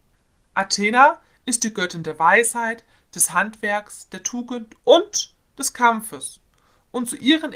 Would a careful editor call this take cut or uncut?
uncut